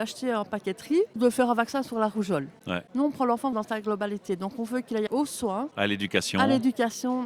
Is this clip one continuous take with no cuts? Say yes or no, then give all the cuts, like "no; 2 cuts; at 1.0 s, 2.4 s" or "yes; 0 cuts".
no; 3 cuts; at 1.2 s, 3.5 s, 5.1 s